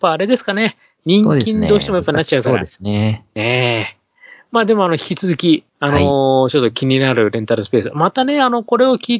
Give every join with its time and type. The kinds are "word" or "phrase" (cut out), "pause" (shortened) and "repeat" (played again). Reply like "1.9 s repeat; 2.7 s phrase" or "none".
3.3 s pause; 5.7 s pause